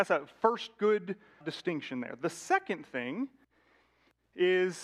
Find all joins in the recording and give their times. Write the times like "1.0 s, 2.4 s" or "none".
1.4 s